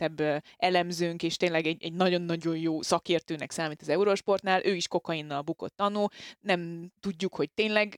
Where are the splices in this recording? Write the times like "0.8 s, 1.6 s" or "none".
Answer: 1.8 s